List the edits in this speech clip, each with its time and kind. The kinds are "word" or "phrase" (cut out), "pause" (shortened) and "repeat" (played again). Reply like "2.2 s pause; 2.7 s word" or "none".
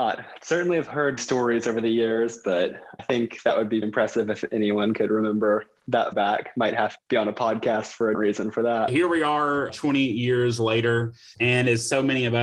1.2 s word; 3.0 s word; 3.8 s word; 6.1 s word; 7.0 s word; 8.1 s word; 9.7 s word; 11.3 s word